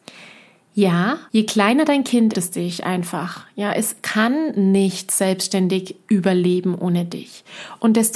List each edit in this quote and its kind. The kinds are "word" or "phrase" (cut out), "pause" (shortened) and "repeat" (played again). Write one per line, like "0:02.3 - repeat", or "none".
0:01.3 - pause
0:02.3 - phrase